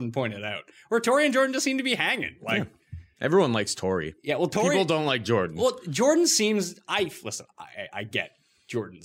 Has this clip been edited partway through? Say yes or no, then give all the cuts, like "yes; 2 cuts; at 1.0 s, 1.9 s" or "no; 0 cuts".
no; 0 cuts